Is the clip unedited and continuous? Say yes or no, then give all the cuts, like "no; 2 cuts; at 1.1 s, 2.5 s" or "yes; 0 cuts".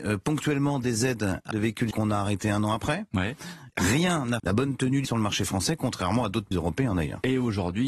no; 5 cuts; at 1.5 s, 1.9 s, 4.4 s, 5.0 s, 6.5 s